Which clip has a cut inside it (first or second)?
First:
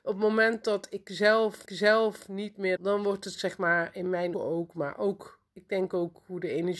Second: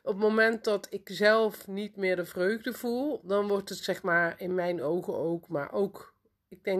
first